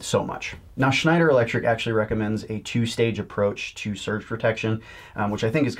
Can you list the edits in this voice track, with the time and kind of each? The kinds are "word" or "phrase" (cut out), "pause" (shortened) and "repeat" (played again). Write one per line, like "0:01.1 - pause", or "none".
none